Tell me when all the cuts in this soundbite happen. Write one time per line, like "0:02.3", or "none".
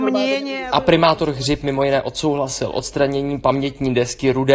none